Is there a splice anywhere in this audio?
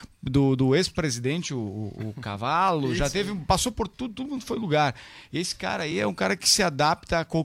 no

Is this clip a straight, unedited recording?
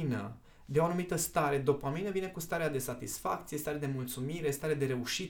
yes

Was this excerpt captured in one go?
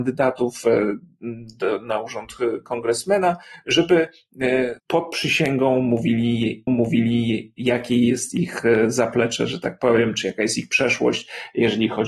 no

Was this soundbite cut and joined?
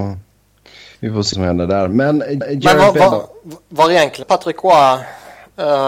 yes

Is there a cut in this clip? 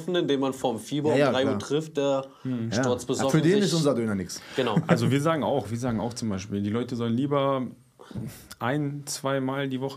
yes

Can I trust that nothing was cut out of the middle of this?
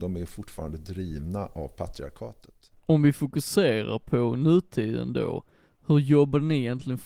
yes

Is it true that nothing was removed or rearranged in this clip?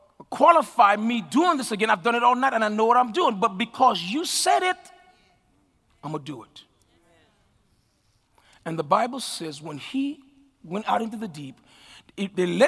yes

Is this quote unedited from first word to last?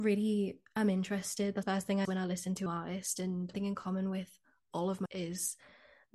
no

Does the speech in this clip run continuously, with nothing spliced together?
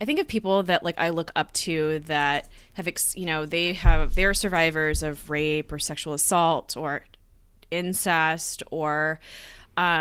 yes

